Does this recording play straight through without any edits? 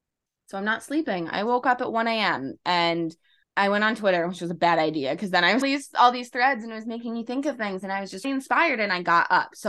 no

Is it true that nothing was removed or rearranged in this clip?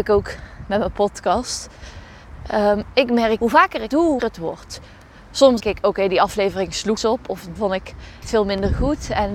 no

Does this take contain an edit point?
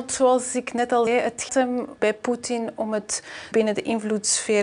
yes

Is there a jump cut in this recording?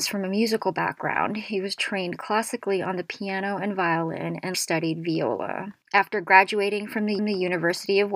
yes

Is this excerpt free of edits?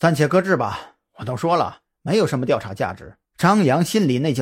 no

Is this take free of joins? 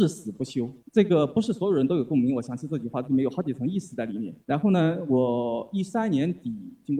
no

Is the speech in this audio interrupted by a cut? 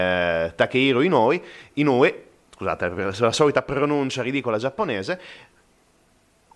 no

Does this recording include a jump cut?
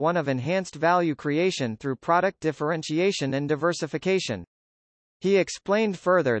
no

